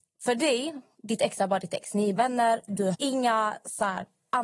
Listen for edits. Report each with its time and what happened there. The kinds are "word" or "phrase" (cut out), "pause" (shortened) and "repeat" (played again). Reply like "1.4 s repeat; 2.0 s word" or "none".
2.2 s word; 2.9 s word